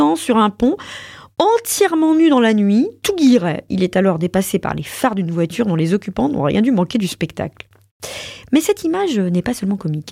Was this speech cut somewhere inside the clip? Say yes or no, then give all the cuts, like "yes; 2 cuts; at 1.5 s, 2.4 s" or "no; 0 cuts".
no; 0 cuts